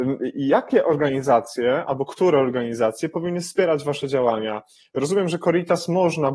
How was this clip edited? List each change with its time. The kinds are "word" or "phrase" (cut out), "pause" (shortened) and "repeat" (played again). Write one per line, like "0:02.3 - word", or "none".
none